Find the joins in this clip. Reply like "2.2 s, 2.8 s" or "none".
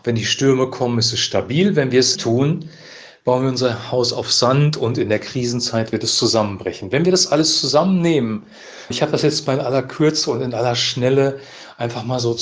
2.2 s, 8.9 s